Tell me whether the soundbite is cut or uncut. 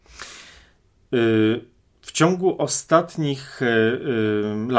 uncut